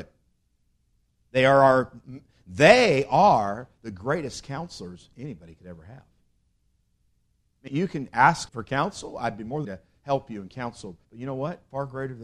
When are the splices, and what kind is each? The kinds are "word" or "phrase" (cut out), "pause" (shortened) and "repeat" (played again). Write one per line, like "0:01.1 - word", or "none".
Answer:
0:07.7 - word
0:08.5 - word
0:09.6 - phrase
0:11.0 - pause